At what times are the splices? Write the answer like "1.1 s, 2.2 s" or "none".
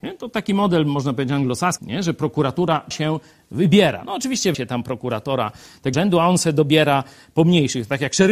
1.8 s, 2.9 s, 4.5 s, 5.9 s